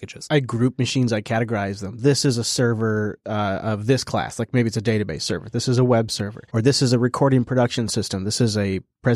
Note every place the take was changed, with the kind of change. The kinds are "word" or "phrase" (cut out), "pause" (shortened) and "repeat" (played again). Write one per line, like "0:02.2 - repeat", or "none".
0:06.5 - pause